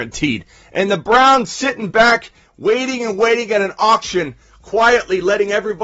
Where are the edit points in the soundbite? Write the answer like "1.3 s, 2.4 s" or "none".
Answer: none